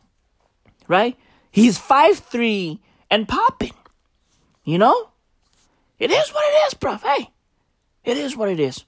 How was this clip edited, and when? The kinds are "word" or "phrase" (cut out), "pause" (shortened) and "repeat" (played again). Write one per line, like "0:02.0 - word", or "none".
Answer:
none